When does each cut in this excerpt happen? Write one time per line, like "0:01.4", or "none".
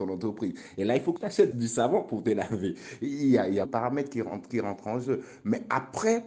0:01.2
0:01.5
0:03.7
0:04.5